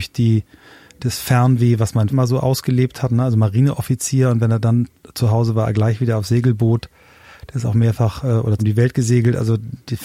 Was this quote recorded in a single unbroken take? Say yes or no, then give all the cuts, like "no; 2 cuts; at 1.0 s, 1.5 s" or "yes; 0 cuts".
no; 2 cuts; at 2.1 s, 8.6 s